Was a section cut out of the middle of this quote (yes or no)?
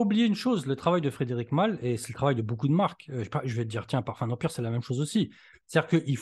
no